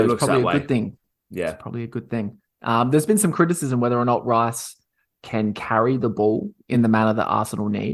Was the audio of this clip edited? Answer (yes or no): no